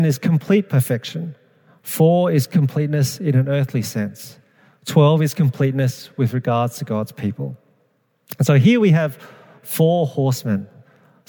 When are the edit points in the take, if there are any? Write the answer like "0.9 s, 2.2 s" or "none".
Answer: none